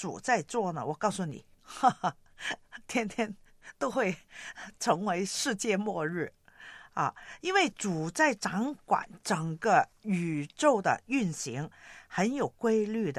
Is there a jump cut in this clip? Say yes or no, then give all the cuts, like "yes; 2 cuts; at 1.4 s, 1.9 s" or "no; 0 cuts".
yes; 2 cuts; at 1.5 s, 9.9 s